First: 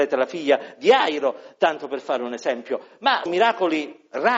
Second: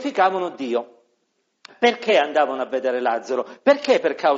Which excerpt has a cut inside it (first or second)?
first